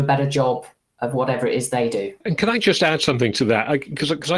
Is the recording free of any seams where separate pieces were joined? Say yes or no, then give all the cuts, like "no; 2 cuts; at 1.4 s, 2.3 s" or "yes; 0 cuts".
no; 1 cut; at 2.2 s